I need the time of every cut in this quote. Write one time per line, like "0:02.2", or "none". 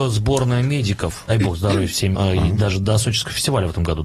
0:01.3
0:02.1